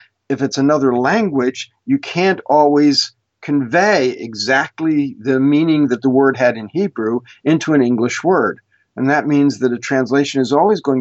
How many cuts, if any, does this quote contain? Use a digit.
0